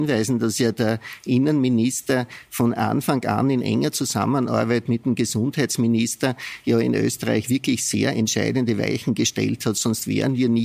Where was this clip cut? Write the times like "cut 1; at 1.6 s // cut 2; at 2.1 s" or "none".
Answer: none